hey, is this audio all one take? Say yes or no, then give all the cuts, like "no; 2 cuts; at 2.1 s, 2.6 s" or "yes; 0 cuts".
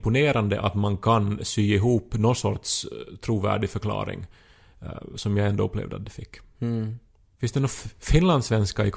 yes; 0 cuts